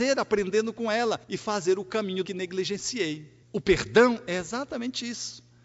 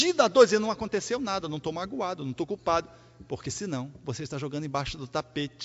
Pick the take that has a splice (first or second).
first